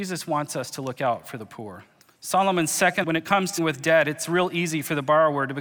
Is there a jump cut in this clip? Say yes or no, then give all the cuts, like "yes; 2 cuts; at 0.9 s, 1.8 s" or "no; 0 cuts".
yes; 3 cuts; at 2.0 s, 3.0 s, 3.6 s